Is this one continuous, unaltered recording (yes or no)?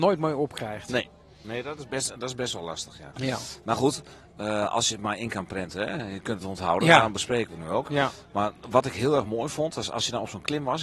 yes